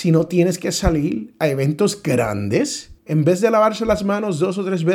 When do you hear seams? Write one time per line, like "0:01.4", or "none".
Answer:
0:03.0